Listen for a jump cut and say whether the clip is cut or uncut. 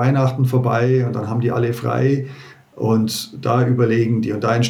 uncut